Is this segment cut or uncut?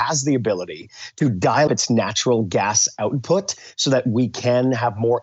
cut